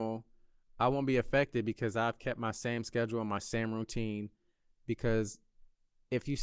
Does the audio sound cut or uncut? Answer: uncut